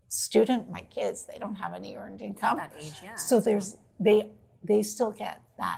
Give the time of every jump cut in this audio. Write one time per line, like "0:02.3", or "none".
none